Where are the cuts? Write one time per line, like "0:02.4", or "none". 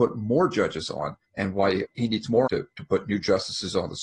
0:01.2
0:01.8
0:02.5